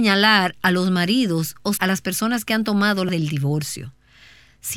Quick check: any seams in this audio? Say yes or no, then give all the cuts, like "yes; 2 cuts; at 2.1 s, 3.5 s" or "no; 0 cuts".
yes; 2 cuts; at 1.8 s, 3.1 s